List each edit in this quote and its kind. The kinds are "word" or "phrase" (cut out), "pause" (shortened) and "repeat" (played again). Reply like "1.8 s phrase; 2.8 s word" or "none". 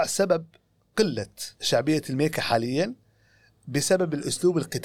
1.5 s pause